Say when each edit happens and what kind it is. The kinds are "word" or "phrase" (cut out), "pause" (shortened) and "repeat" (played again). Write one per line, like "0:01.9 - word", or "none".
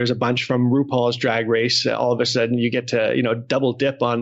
none